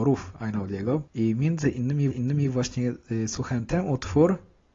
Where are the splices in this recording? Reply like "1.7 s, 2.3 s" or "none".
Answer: 1.1 s, 2.1 s, 3.7 s